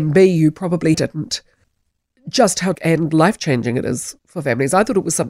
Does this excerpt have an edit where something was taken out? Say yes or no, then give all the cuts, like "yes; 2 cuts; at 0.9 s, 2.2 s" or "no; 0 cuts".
yes; 3 cuts; at 0.9 s, 1.6 s, 2.7 s